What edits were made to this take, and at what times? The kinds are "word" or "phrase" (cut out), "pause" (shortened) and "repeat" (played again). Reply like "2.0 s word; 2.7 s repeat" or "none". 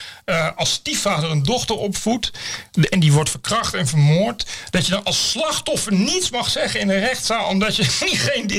none